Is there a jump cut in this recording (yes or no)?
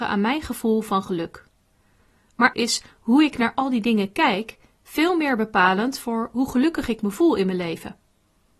yes